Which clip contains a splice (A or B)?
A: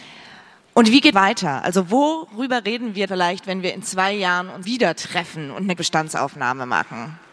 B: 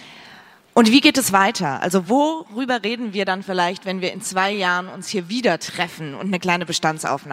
A